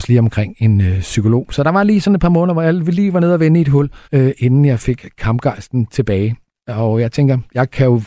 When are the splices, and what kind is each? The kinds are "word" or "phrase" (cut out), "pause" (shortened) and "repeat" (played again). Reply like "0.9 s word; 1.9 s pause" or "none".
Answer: 4.0 s pause